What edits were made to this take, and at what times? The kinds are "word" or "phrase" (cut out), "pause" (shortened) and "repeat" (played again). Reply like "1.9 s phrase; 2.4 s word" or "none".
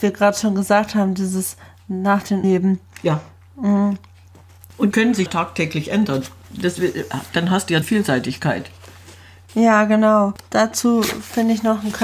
2.4 s word; 4.9 s word; 5.3 s word; 7.8 s word